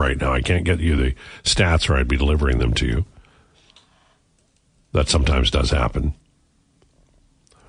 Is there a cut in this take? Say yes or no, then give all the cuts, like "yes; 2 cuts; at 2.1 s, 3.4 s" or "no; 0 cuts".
no; 0 cuts